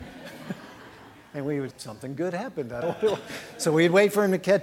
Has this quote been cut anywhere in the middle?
yes; 2 cuts; at 1.7 s, 2.8 s

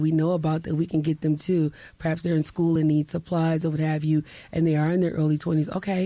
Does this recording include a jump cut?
no; 0 cuts

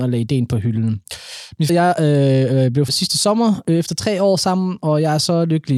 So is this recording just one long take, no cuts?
no; 2 cuts; at 1.7 s, 2.9 s

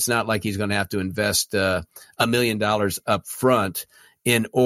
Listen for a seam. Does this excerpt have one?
no; 0 cuts

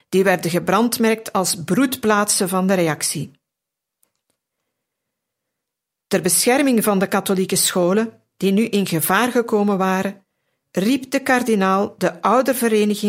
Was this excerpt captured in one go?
yes; 0 cuts

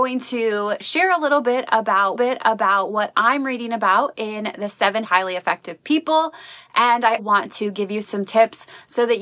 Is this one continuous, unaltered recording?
no; 3 cuts; at 2.1 s, 5.0 s, 7.2 s

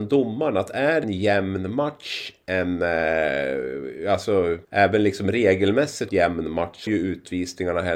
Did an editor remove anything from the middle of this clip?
yes; 4 cuts; at 1.0 s, 4.6 s, 6.1 s, 6.9 s

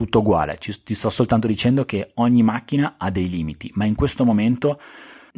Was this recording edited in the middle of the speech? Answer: no; 0 cuts

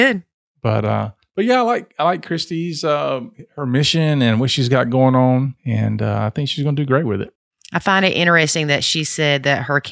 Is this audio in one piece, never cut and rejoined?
yes; 0 cuts

